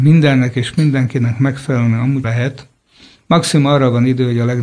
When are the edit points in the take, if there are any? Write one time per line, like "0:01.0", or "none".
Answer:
0:02.2